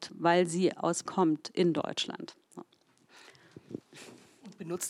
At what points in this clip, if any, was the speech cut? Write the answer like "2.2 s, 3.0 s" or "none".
1.1 s